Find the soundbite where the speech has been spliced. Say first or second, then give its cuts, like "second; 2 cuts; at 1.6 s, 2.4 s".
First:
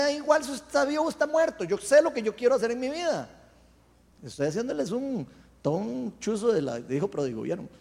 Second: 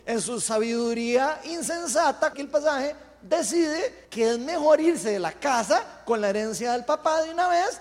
second; 2 cuts; at 2.3 s, 4.0 s